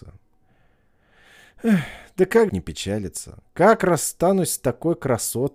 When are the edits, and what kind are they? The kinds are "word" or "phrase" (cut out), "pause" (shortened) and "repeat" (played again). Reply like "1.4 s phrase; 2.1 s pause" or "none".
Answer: 2.5 s phrase

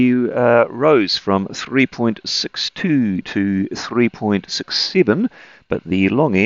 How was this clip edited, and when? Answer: none

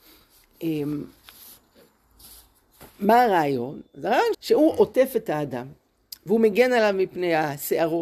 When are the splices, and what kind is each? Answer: 4.3 s phrase

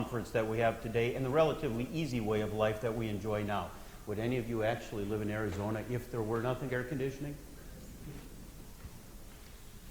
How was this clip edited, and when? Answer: 6.7 s word

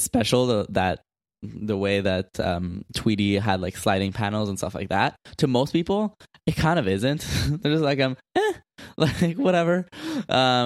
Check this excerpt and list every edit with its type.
none

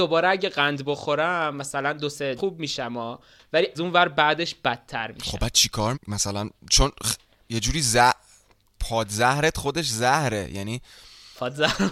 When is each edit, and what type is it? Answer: 2.4 s word; 3.7 s word; 5.9 s word

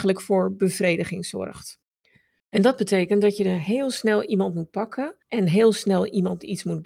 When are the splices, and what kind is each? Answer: none

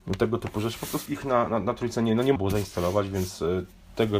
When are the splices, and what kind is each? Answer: 1.1 s word; 2.4 s word

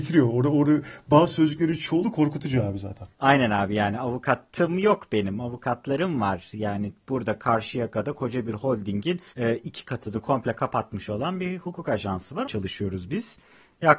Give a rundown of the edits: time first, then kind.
3.1 s pause; 9.3 s pause; 12.4 s word

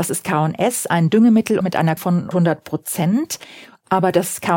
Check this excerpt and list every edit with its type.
1.6 s phrase; 2.0 s word; 2.3 s word

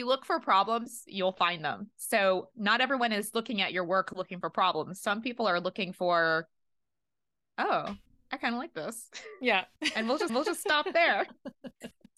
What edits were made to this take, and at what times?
10.3 s repeat

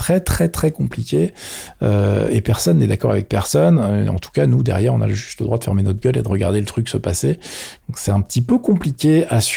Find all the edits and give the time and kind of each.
none

